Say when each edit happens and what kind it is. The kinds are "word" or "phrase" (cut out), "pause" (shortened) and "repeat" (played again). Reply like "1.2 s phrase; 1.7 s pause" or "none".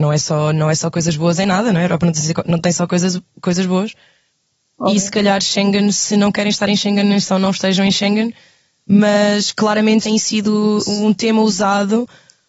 10.0 s phrase